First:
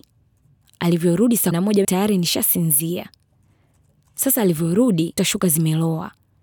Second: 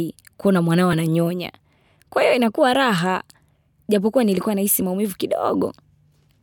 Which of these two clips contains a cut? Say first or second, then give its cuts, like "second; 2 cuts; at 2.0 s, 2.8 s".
first; 3 cuts; at 1.5 s, 1.8 s, 5.2 s